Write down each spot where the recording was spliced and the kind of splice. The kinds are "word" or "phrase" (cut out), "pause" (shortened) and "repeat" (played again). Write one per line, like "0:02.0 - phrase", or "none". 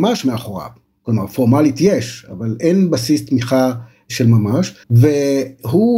0:04.8 - pause